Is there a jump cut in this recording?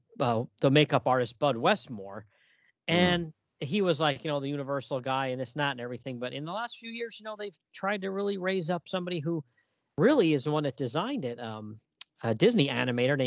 no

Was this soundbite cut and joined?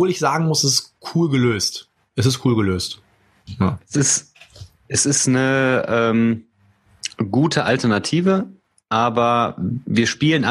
no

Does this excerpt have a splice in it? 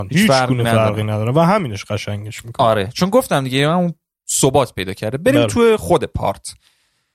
no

